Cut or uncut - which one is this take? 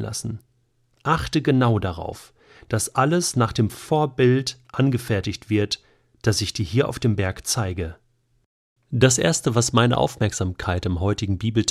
uncut